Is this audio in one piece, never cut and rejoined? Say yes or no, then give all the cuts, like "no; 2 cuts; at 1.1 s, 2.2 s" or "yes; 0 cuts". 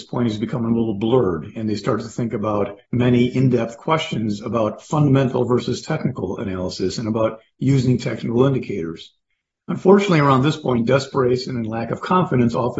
yes; 0 cuts